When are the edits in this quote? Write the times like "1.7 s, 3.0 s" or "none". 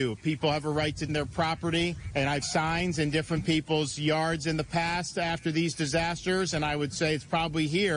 1.1 s, 2.4 s